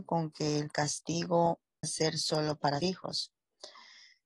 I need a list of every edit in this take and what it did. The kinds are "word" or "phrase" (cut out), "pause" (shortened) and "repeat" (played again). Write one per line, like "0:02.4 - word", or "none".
0:01.8 - word
0:02.8 - word